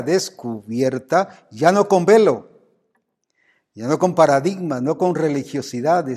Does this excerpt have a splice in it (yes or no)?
no